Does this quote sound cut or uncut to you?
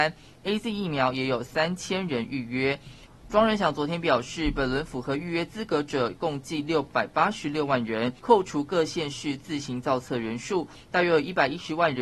cut